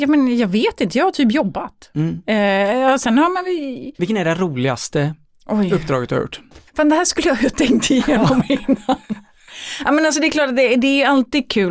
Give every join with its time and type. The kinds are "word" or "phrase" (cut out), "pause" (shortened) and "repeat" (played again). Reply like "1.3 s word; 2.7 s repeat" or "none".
3.9 s pause; 5.2 s pause; 6.7 s pause